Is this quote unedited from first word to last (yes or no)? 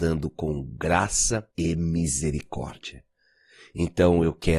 no